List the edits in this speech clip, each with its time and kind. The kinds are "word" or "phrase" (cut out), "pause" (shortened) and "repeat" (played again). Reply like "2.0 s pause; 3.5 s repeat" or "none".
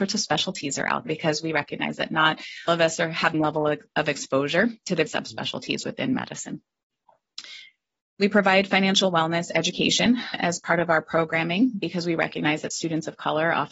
1.1 s word; 2.7 s word; 3.3 s word; 5.1 s word; 10.3 s word

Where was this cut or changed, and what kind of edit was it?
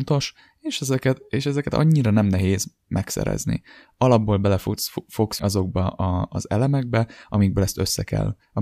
5.4 s word

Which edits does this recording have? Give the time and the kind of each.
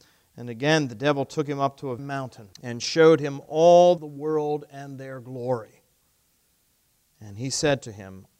2.0 s phrase; 2.5 s pause; 4.0 s phrase

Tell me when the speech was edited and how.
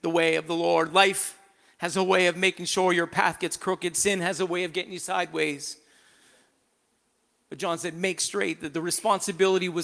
none

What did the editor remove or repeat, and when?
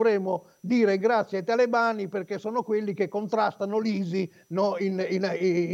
none

